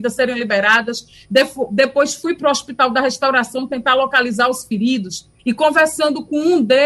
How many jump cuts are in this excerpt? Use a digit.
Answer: 1